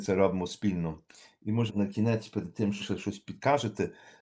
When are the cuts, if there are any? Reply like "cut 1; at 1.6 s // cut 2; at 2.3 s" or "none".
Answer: cut 1; at 1.7 s // cut 2; at 2.8 s